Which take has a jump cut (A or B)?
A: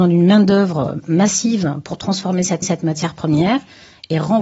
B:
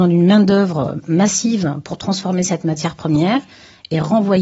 A